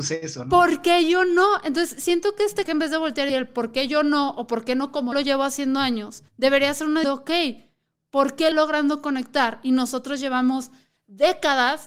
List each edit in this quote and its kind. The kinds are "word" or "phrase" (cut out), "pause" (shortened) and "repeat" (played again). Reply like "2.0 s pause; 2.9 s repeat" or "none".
2.7 s word; 3.3 s word; 5.1 s word; 6.3 s pause; 7.0 s word; 8.5 s word